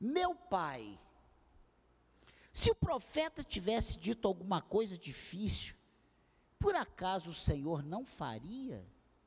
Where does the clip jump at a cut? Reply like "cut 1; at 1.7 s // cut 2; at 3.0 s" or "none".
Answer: none

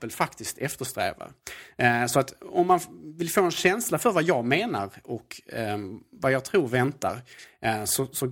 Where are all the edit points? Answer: none

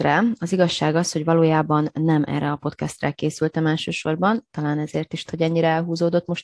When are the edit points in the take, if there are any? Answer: cut 1; at 5.3 s

